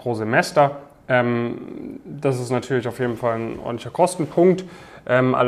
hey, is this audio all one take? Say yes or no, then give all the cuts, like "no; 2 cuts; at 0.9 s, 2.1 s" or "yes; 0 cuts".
yes; 0 cuts